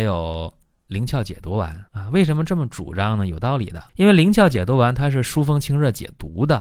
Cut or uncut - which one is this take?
cut